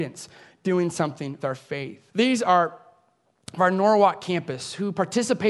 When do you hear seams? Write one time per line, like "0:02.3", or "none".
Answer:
0:01.4
0:02.1
0:03.6